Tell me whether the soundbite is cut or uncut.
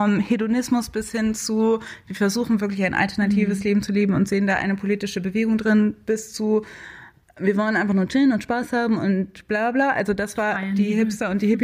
uncut